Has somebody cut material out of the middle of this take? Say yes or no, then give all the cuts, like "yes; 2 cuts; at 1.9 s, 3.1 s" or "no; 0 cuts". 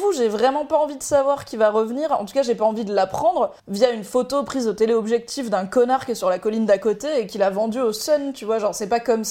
yes; 1 cut; at 3.6 s